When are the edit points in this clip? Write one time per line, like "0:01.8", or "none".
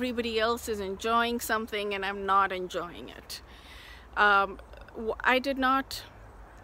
none